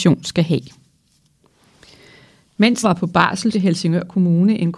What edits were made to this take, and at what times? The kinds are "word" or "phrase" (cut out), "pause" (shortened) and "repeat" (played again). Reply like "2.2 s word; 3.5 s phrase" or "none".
2.8 s word; 3.5 s word